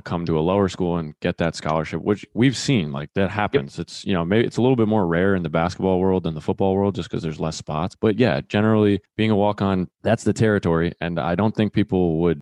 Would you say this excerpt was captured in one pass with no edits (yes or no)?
no